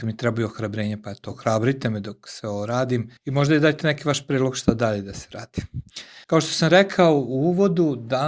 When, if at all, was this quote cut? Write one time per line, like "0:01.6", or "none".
0:03.2
0:06.2